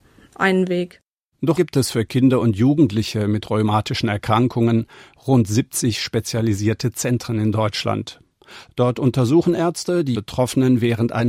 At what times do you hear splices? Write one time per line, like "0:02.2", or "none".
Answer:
0:01.6
0:10.1